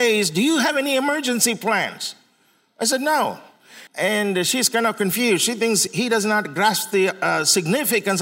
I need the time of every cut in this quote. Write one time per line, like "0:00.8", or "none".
0:03.9